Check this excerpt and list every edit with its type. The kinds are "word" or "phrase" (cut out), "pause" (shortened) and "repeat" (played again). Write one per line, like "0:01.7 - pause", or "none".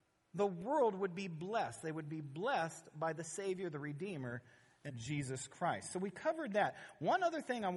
0:04.9 - word